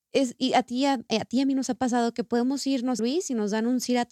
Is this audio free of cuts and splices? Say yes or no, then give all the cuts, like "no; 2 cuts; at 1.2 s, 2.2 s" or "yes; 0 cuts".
no; 1 cut; at 3.0 s